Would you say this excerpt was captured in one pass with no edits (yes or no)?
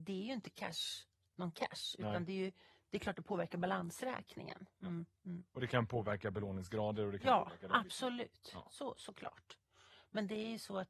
yes